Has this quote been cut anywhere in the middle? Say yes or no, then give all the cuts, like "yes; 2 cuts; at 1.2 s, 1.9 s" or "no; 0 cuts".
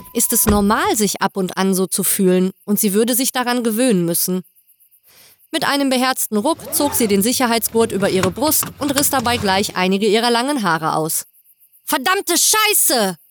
no; 0 cuts